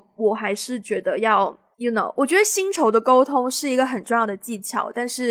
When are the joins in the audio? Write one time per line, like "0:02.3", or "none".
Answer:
0:01.7